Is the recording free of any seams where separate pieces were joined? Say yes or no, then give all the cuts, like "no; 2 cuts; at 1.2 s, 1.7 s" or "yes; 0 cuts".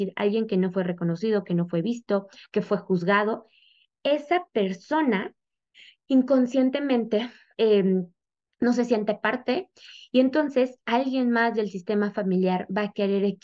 no; 1 cut; at 7.5 s